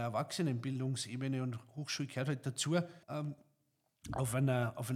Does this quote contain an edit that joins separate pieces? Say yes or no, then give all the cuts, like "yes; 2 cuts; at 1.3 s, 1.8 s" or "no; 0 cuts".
yes; 1 cut; at 3.0 s